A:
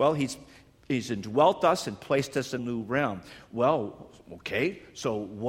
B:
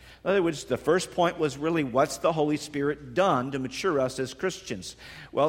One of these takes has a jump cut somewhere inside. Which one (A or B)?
A